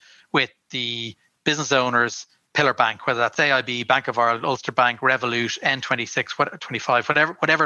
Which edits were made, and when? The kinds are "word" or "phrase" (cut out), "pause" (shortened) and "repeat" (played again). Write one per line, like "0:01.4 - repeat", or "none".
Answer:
none